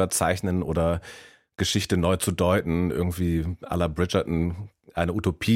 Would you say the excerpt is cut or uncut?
uncut